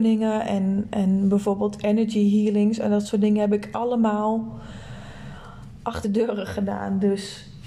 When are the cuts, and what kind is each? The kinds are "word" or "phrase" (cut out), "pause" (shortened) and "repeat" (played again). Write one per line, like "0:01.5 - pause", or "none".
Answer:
0:06.0 - word